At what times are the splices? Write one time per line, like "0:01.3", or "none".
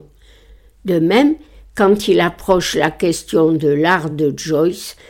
none